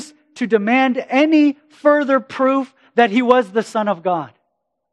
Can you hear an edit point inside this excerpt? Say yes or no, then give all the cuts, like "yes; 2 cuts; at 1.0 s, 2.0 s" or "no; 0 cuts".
no; 0 cuts